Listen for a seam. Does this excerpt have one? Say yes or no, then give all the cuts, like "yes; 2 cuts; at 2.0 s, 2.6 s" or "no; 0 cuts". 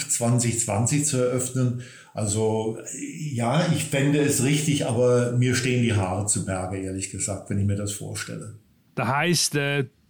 no; 0 cuts